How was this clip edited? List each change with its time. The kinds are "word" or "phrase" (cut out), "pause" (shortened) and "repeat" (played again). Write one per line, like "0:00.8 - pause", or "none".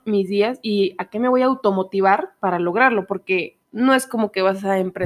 0:03.6 - pause